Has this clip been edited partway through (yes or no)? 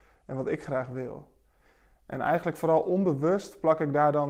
no